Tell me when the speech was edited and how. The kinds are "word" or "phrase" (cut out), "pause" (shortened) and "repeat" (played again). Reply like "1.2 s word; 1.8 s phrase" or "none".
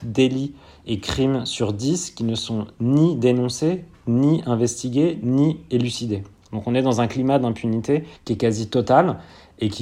8.2 s pause